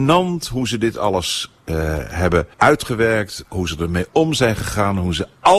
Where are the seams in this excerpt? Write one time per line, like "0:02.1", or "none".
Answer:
0:02.5